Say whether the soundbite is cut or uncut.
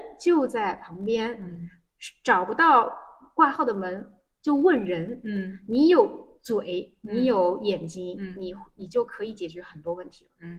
uncut